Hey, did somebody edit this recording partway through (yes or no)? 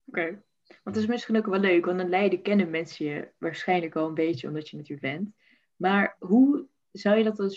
yes